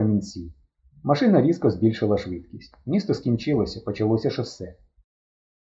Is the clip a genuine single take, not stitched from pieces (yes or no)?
yes